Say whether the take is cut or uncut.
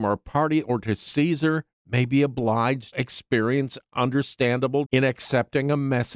cut